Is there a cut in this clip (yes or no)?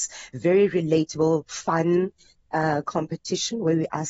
no